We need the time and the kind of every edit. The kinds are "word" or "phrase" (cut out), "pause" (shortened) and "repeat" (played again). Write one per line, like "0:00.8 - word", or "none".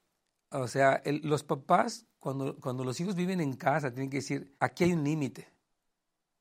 0:04.6 - pause